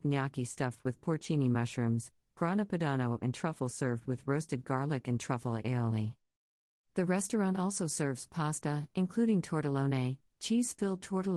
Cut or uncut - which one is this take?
uncut